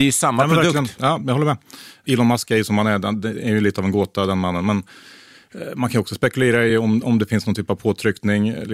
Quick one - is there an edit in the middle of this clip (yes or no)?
no